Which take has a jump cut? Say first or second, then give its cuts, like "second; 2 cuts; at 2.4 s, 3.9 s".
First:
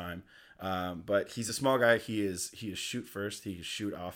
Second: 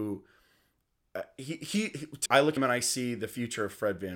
second; 2 cuts; at 2.3 s, 2.6 s